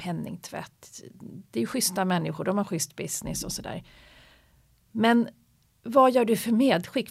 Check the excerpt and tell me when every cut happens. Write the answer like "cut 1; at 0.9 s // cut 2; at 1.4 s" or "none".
none